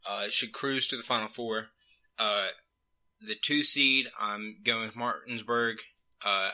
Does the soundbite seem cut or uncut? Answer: uncut